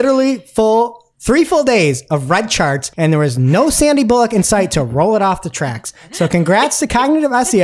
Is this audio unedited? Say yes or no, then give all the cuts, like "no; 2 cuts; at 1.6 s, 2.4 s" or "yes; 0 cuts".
no; 1 cut; at 2.9 s